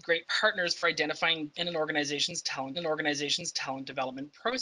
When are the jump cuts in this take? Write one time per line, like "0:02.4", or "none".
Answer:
0:01.5
0:02.7